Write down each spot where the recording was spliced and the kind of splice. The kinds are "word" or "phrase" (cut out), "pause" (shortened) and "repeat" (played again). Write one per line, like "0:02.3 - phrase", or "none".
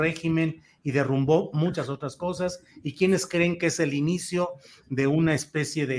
none